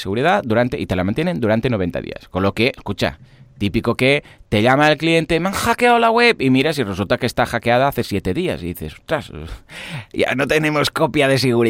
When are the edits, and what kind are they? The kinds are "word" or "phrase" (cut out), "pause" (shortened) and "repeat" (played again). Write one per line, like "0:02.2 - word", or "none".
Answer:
none